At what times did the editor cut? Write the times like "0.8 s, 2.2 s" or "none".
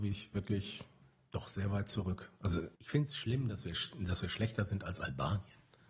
1.0 s, 2.7 s